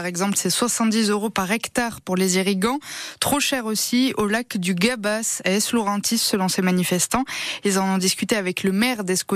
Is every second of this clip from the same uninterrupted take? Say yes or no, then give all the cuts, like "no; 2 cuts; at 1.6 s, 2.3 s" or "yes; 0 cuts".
yes; 0 cuts